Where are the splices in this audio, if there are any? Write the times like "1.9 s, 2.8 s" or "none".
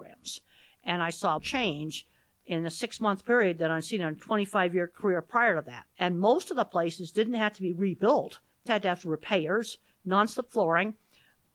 1.4 s, 5.9 s, 8.7 s

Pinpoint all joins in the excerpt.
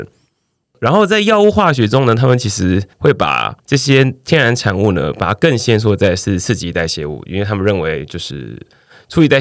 2.9 s, 3.6 s

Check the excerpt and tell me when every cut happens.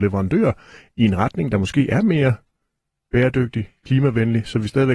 none

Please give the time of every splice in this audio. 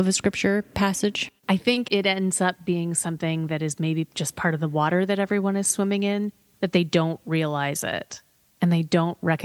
1.4 s

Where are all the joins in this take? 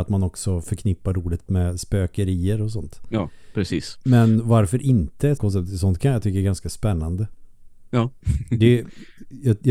1.5 s, 5.4 s

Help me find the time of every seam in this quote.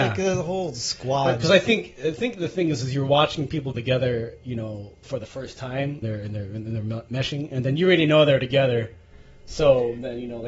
3.7 s, 6.0 s

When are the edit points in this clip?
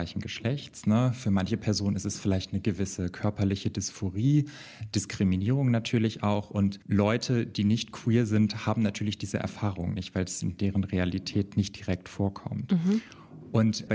6.8 s

